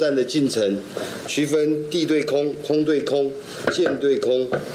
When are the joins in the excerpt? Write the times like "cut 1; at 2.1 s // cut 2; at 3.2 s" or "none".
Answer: cut 1; at 1.2 s